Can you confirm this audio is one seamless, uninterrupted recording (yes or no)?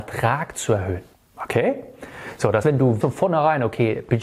no